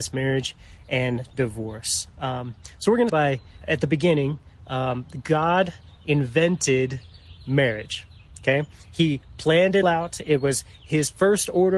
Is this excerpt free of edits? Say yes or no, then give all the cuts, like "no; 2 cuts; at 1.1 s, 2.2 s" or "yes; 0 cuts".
no; 3 cuts; at 3.1 s, 3.6 s, 9.8 s